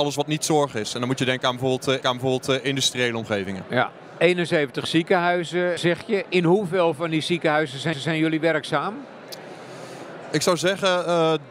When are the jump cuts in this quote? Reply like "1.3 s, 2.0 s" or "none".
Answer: 2.0 s, 5.8 s, 7.9 s